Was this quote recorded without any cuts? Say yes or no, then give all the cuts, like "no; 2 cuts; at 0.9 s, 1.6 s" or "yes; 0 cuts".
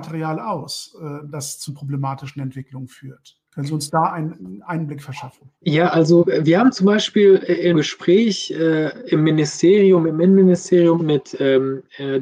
no; 5 cuts; at 1.7 s, 3.5 s, 5.5 s, 7.7 s, 11.0 s